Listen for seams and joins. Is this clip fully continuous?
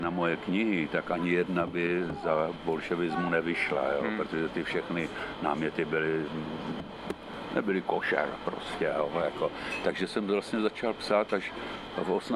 yes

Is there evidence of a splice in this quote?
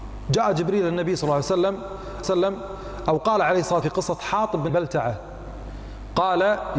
yes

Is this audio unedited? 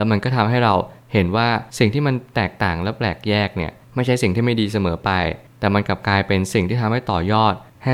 no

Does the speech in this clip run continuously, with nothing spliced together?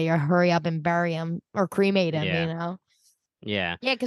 yes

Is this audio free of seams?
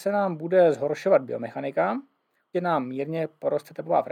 no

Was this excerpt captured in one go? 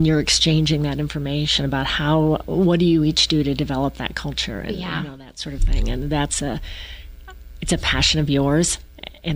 yes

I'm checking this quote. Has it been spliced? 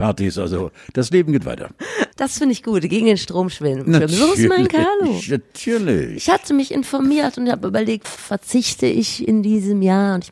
yes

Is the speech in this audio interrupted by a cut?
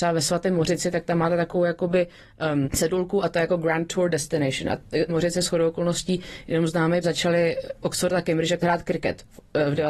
yes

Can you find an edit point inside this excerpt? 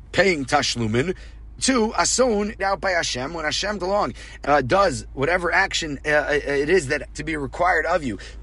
yes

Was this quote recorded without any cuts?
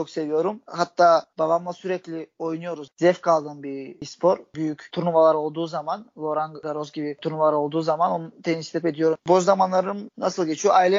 no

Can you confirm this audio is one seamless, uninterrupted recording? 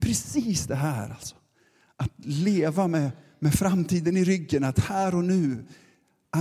yes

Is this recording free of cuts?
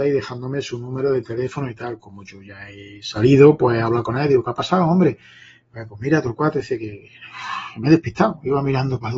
yes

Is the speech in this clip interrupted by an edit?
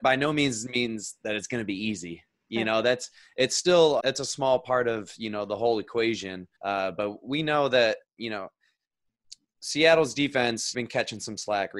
yes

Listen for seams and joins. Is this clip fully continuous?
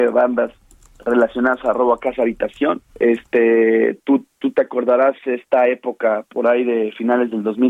no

